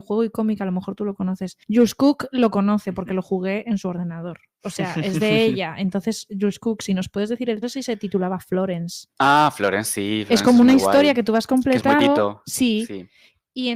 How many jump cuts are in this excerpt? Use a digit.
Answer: 4